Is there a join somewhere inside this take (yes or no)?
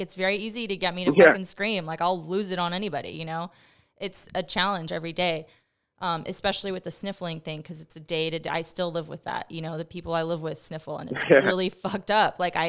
no